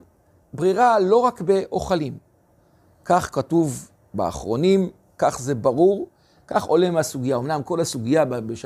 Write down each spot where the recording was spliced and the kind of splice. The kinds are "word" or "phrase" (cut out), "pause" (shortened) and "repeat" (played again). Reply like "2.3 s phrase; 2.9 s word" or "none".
none